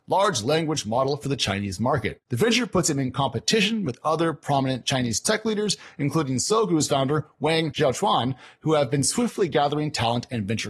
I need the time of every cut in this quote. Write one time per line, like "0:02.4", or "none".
0:02.2